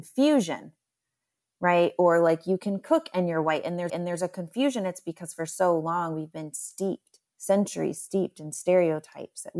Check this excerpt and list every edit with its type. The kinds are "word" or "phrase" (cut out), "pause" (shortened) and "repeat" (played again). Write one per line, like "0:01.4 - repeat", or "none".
0:03.9 - repeat
0:07.3 - pause